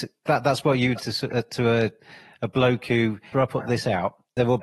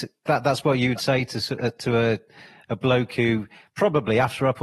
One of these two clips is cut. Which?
first; 2 cuts; at 1.0 s, 3.3 s

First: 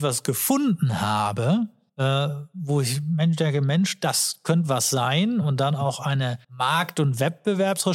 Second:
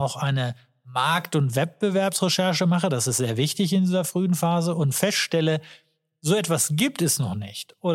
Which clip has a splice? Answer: first; 2 cuts; at 1.9 s, 6.4 s

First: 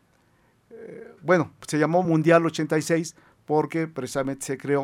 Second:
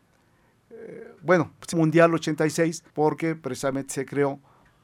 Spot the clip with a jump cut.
second; 2 cuts; at 1.7 s, 2.9 s

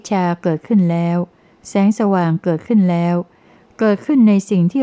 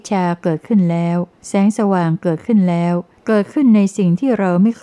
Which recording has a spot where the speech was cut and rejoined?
second; 2 cuts; at 1.4 s, 3.1 s

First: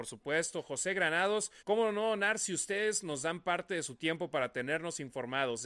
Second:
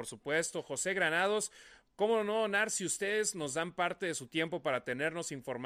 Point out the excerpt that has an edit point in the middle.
first; 1 cut; at 1.6 s

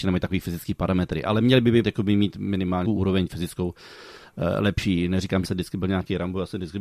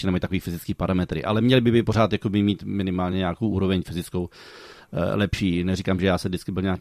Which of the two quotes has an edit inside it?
first; 3 cuts; at 1.8 s, 2.8 s, 5.4 s

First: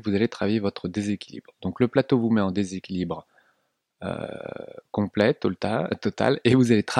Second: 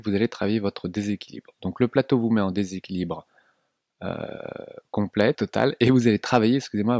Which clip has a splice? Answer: second; 1 cut; at 5.3 s

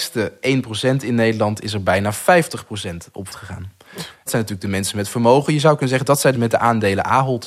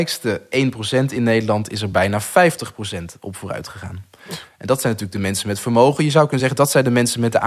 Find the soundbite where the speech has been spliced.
first; 3 cuts; at 3.3 s, 4.3 s, 6.3 s

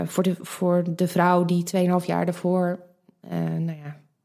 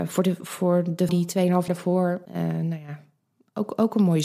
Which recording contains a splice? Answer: second; 3 cuts; at 1.1 s, 1.7 s, 2.3 s

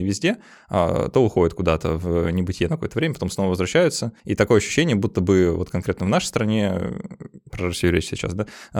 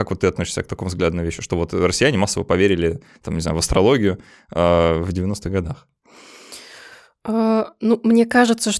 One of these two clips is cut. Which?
first; 1 cut; at 4.2 s

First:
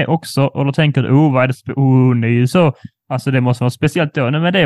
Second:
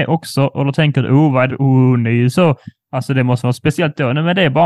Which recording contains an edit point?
second; 1 cut; at 1.5 s

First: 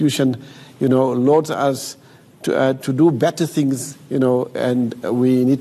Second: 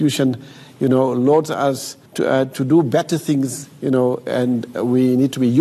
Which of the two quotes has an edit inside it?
second; 1 cut; at 2.1 s

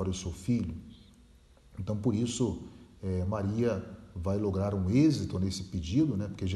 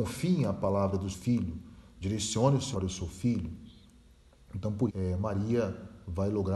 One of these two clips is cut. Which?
second; 3 cuts; at 1.1 s, 2.7 s, 4.9 s

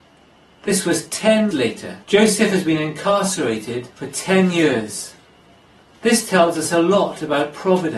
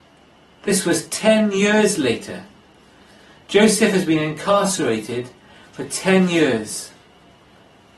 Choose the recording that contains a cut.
first; 4 cuts; at 1.5 s, 2.0 s, 3.9 s, 5.8 s

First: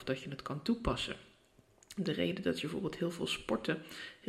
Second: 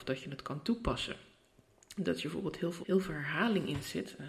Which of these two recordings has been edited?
second; 2 cuts; at 2.0 s, 2.8 s

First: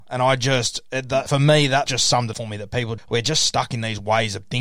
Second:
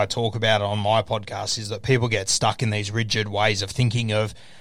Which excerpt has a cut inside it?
first; 4 cuts; at 1.3 s, 1.9 s, 2.3 s, 3.0 s

